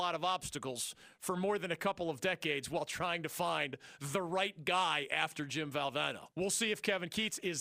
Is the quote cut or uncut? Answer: cut